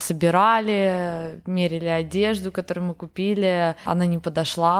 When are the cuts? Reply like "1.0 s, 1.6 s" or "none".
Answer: none